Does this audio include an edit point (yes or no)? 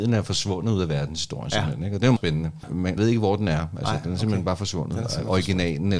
yes